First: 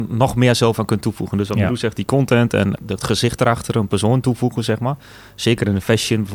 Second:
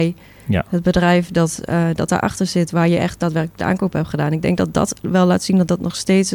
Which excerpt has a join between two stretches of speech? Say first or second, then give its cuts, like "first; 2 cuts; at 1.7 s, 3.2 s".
first; 1 cut; at 2.8 s